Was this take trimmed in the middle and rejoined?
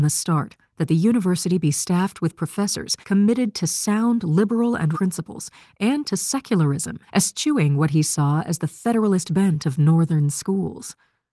yes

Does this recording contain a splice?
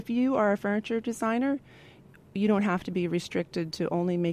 no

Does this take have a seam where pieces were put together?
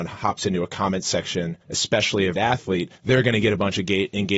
yes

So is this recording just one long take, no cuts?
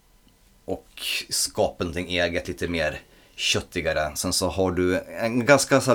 yes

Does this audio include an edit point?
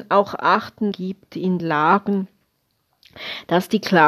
yes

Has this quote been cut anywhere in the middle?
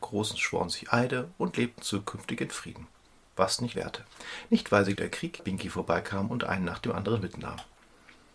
yes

